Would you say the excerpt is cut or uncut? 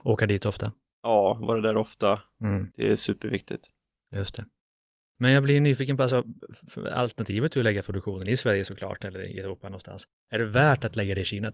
uncut